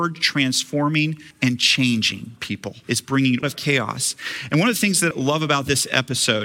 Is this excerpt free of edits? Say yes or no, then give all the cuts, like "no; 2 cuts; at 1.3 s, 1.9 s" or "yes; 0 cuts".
no; 4 cuts; at 1.3 s, 2.8 s, 3.4 s, 5.1 s